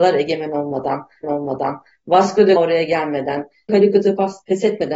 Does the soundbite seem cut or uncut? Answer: cut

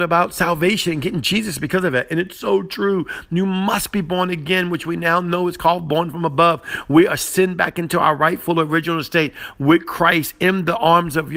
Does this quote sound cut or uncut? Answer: uncut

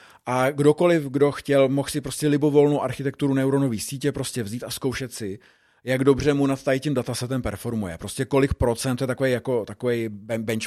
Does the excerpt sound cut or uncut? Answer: uncut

